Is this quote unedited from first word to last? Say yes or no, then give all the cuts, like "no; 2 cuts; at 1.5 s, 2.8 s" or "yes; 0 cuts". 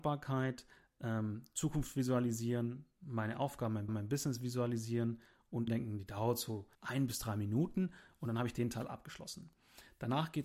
no; 3 cuts; at 3.9 s, 5.7 s, 6.7 s